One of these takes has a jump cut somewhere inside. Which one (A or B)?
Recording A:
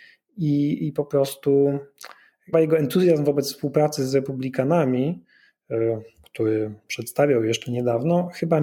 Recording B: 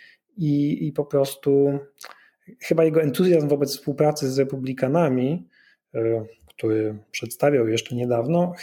A